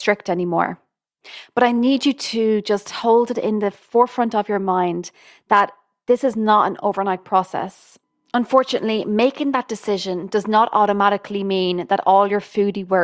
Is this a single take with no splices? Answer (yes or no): yes